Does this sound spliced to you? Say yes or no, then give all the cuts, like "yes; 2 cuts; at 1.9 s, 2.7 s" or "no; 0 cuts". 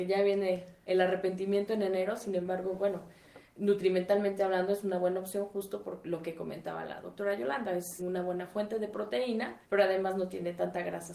yes; 2 cuts; at 8.0 s, 9.6 s